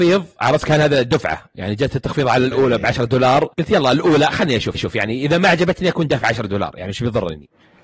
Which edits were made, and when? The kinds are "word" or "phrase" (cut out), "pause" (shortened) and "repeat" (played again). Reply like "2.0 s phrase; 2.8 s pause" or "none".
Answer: 3.5 s pause; 4.7 s repeat

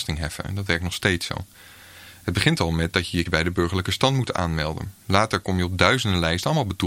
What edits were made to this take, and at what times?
3.3 s word

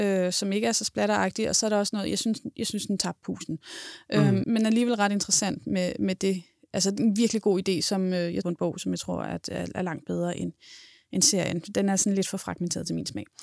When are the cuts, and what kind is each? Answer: 4.4 s word; 8.4 s phrase

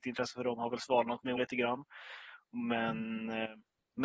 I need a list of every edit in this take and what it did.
1.4 s word

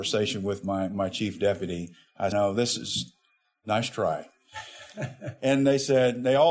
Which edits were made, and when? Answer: 2.3 s phrase

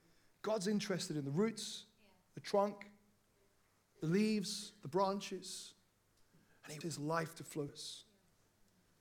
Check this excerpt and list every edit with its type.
6.8 s word; 7.7 s word

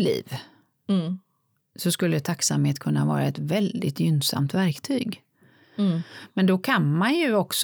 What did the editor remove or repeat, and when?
none

